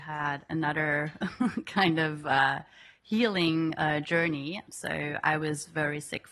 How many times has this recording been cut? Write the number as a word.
zero